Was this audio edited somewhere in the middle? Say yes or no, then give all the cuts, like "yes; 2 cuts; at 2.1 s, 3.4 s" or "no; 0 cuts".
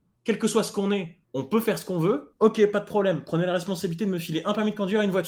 yes; 1 cut; at 1.2 s